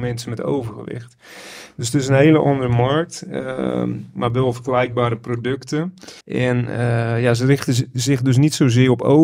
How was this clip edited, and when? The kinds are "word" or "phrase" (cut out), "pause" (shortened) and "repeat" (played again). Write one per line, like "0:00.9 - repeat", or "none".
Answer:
0:06.2 - pause